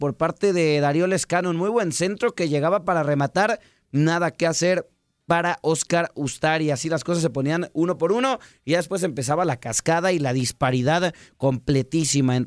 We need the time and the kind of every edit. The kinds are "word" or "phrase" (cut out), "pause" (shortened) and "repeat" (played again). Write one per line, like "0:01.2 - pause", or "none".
none